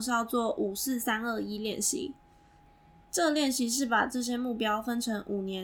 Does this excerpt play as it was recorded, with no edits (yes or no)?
yes